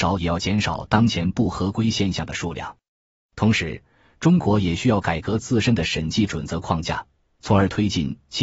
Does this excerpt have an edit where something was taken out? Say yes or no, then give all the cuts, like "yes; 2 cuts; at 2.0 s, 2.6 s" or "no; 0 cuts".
no; 0 cuts